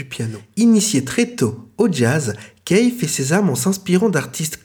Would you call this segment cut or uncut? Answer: uncut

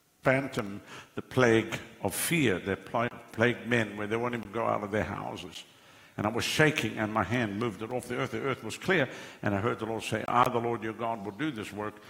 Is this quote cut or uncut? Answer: uncut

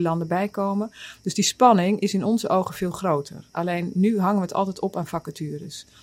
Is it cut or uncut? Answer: uncut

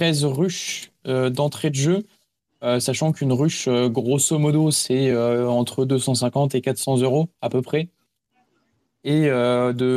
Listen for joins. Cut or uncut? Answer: uncut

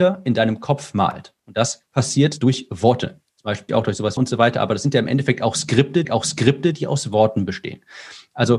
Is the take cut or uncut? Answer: cut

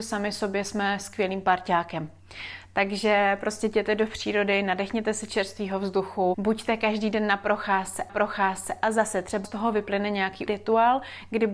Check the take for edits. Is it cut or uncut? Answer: cut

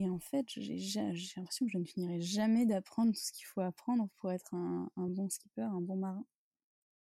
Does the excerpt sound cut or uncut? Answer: uncut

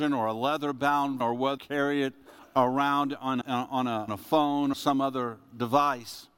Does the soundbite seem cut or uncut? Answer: cut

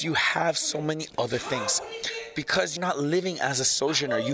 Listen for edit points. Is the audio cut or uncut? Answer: cut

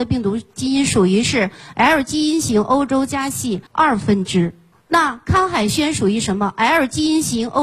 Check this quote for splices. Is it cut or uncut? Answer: cut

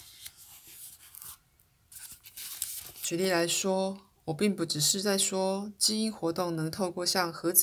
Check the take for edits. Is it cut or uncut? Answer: uncut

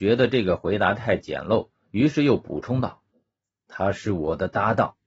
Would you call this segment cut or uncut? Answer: cut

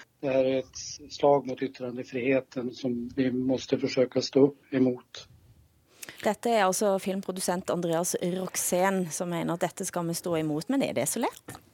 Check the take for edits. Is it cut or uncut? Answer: cut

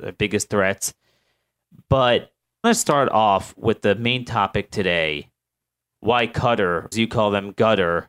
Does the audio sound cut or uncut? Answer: cut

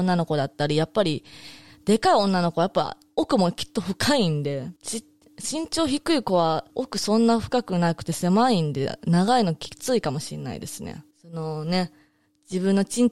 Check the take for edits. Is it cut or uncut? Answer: cut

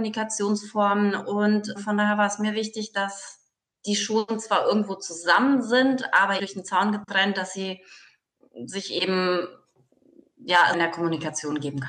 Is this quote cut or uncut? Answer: cut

